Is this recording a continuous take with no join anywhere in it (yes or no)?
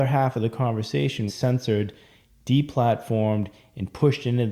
no